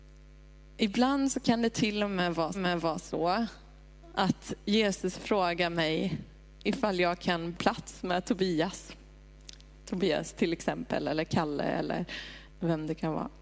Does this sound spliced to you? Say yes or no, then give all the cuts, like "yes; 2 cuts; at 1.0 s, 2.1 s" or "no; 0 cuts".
yes; 3 cuts; at 2.5 s, 7.5 s, 12.5 s